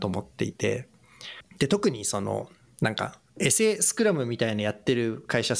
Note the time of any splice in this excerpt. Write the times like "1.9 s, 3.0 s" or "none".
3.3 s